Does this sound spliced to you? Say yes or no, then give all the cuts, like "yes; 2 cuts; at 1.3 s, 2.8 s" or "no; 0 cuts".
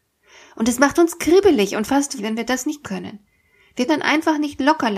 yes; 3 cuts; at 2.2 s, 2.8 s, 3.9 s